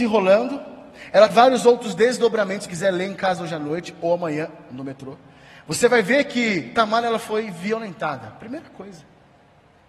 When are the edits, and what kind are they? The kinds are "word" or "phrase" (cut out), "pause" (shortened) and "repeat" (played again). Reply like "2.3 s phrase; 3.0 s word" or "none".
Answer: 1.3 s word; 2.7 s word